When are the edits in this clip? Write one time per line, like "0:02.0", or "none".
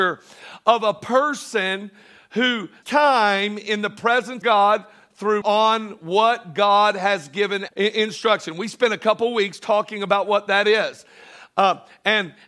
0:02.8
0:04.4
0:05.4
0:07.7